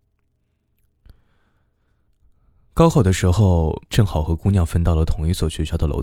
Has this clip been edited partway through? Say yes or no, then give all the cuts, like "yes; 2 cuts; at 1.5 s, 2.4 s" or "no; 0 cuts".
yes; 1 cut; at 3.9 s